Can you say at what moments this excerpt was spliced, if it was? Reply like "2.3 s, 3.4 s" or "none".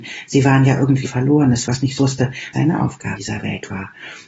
1.0 s, 1.7 s, 2.0 s, 2.5 s, 3.2 s